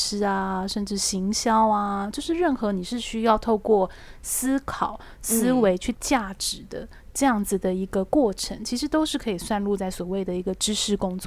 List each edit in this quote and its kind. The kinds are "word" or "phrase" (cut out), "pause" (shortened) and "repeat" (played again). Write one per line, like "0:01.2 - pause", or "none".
0:05.9 - word